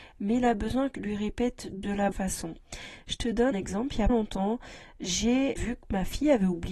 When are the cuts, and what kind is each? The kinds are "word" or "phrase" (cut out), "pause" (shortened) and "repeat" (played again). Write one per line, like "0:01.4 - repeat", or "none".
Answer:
0:00.9 - word
0:02.1 - word
0:03.5 - word
0:04.1 - word
0:05.6 - word